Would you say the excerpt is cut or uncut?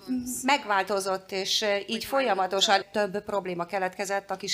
cut